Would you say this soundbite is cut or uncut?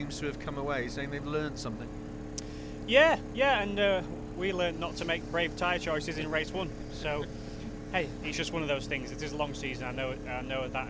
uncut